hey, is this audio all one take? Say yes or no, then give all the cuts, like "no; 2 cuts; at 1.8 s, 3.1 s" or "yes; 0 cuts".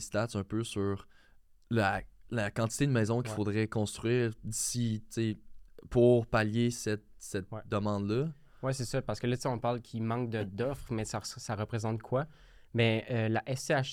yes; 0 cuts